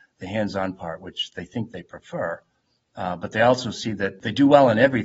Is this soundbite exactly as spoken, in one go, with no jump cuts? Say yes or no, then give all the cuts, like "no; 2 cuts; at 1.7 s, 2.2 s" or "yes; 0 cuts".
yes; 0 cuts